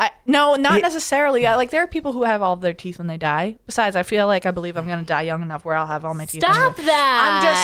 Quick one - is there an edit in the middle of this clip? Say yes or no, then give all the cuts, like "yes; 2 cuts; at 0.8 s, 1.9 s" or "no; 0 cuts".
no; 0 cuts